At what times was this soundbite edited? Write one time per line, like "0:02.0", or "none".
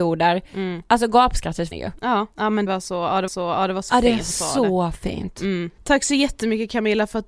0:01.7
0:02.3
0:02.7
0:03.3
0:03.9
0:04.3